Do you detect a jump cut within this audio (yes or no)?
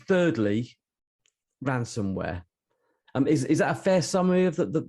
no